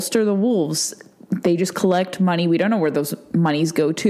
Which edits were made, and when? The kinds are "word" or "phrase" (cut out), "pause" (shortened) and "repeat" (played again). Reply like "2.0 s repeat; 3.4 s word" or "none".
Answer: none